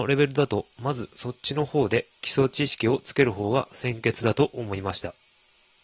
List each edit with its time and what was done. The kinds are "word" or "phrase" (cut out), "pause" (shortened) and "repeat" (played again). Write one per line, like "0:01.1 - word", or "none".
0:02.2 - pause

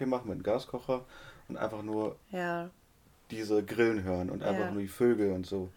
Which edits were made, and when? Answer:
none

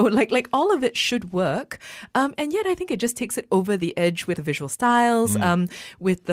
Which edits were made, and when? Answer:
0:04.4 - word

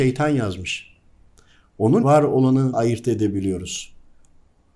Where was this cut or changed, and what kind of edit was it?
0:02.0 - word
0:02.7 - word

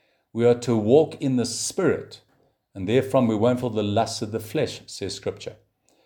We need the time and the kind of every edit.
0:03.6 - word

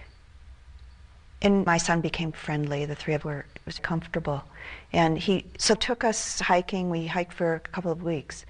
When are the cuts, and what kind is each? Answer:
0:01.7 - phrase
0:02.3 - word
0:03.2 - word
0:03.8 - word
0:05.8 - phrase

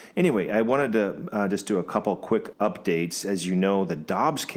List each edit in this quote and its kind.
0:02.5 - phrase

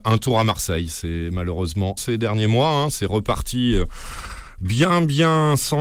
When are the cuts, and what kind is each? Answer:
0:02.0 - word

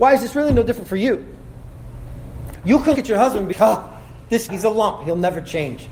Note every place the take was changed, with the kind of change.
0:02.9 - word
0:03.5 - word
0:04.5 - word

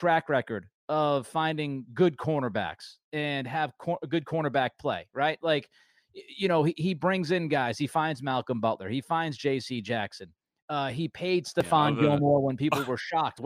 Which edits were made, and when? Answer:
none

